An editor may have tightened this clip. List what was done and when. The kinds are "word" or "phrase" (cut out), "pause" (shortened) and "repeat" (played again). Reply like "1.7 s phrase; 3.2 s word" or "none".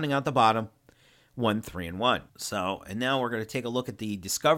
2.3 s pause